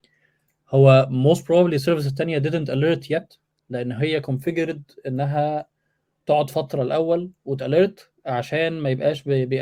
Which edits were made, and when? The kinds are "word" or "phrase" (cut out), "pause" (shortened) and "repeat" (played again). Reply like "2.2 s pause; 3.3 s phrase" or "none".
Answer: none